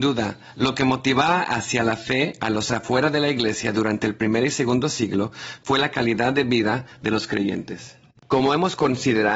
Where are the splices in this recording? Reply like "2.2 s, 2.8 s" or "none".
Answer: none